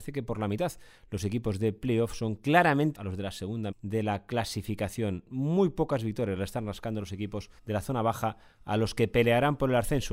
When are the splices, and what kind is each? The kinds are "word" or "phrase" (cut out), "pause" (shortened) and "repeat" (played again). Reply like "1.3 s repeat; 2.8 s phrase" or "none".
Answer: 2.9 s word; 3.7 s word; 7.6 s pause